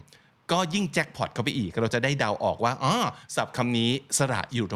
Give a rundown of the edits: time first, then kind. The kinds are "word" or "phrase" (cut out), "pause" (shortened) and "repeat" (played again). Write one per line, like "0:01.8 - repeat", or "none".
0:03.2 - pause